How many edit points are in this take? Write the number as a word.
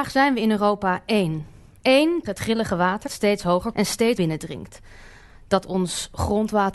four